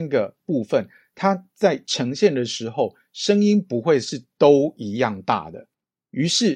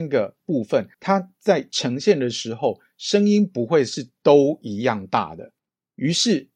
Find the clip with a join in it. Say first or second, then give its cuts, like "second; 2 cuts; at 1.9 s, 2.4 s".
second; 1 cut; at 0.9 s